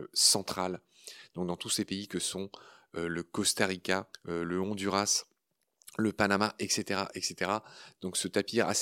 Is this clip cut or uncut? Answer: cut